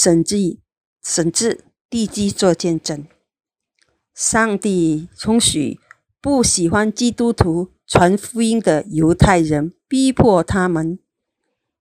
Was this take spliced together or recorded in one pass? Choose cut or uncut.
uncut